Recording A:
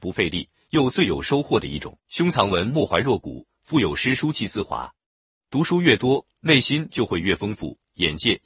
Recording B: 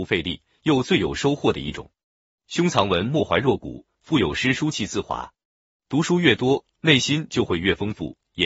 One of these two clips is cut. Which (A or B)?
A